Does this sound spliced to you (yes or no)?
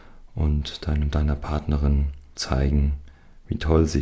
yes